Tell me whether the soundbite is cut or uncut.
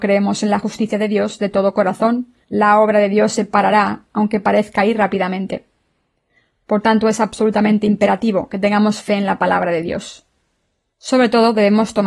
cut